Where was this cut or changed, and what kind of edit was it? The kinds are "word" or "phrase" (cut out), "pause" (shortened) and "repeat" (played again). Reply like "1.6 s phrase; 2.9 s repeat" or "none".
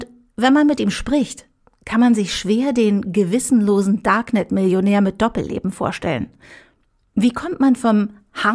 none

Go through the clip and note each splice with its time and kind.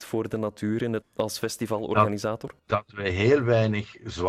1.0 s word; 2.6 s pause

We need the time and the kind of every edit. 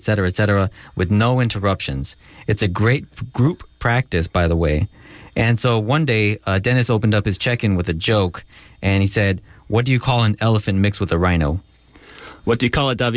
none

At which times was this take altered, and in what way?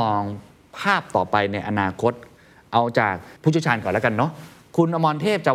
3.4 s pause

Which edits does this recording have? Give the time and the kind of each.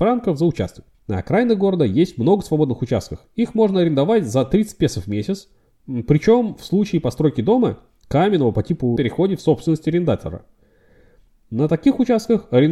0.9 s pause; 9.0 s phrase

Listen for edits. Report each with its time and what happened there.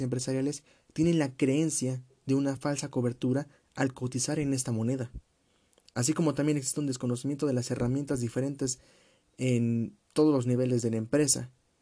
none

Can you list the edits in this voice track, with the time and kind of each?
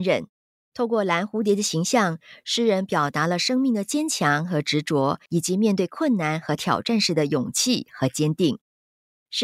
5.3 s pause

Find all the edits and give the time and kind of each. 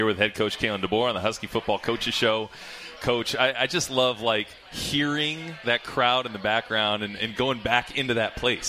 4.6 s pause

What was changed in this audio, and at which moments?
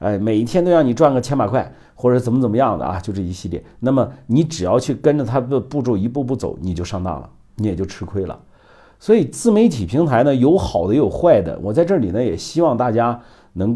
none

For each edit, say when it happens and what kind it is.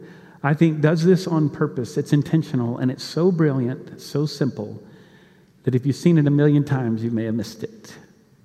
none

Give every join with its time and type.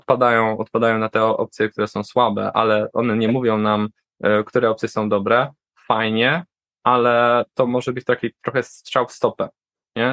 none

